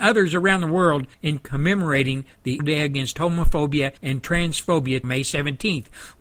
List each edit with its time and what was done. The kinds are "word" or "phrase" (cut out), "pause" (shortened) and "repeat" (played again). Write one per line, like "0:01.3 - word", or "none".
0:01.1 - pause
0:02.6 - word
0:04.0 - pause
0:05.0 - word